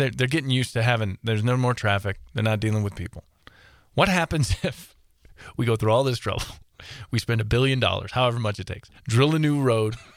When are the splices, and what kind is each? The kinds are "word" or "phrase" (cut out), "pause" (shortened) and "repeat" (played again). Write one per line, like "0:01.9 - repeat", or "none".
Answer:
0:09.0 - pause